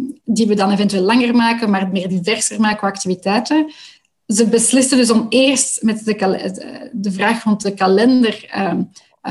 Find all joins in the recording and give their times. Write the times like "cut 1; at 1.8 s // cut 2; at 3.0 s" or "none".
none